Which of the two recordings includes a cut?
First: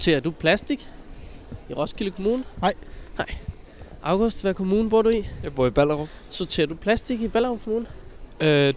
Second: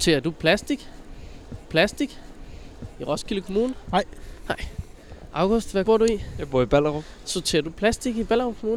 second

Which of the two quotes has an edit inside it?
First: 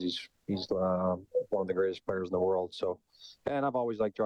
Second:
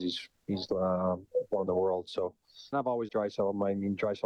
second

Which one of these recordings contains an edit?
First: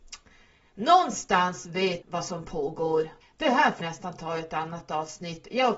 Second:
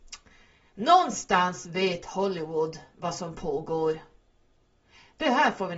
first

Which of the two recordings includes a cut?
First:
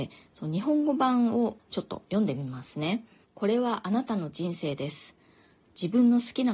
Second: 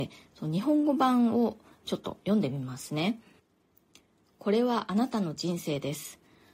first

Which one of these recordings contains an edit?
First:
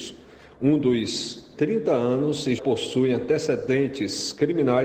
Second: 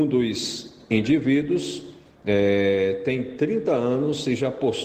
first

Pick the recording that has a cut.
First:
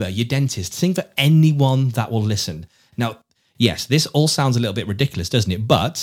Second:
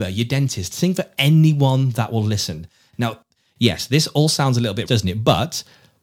second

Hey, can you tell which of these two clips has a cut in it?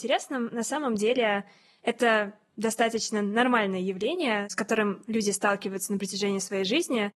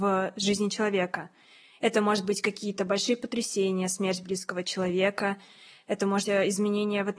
second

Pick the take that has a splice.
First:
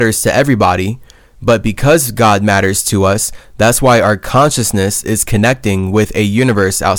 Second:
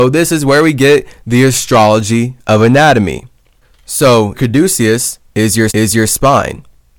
second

